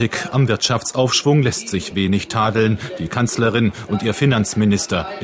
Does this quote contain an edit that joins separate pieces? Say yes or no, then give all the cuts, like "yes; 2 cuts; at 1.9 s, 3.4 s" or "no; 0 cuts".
no; 0 cuts